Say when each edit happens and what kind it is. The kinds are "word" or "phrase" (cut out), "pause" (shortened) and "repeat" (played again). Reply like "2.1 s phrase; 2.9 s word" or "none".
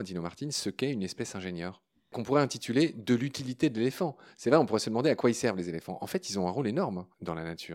none